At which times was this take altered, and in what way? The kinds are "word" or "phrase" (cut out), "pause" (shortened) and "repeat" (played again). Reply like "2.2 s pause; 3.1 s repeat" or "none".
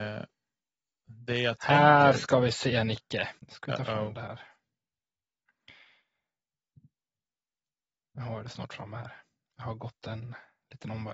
3.4 s pause